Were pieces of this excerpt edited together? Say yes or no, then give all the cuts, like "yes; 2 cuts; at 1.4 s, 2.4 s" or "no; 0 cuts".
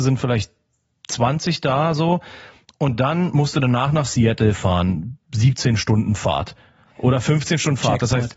no; 0 cuts